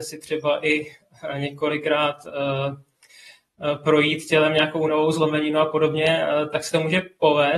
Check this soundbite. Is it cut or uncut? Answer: uncut